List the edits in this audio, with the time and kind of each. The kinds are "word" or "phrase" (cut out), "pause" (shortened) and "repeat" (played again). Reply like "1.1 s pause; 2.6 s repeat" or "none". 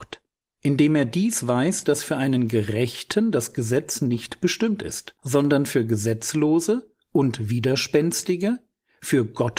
5.2 s pause